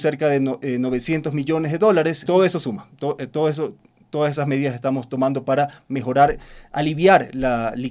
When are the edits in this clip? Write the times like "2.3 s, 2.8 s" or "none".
2.3 s

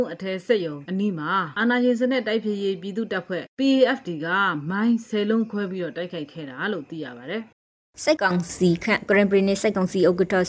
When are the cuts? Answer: 3.5 s, 7.5 s

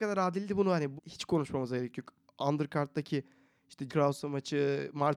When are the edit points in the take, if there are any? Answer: 1.0 s, 3.9 s

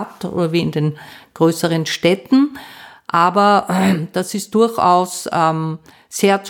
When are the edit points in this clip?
none

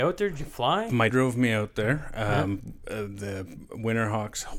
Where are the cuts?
1.1 s

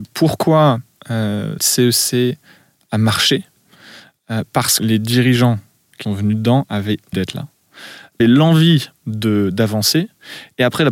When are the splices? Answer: 1.6 s, 4.8 s, 6.0 s, 7.1 s, 8.2 s

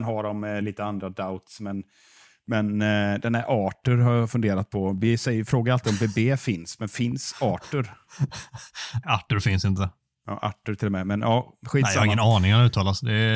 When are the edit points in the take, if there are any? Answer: 9.0 s

